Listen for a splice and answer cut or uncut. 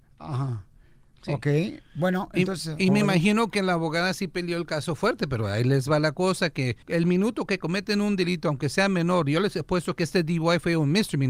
cut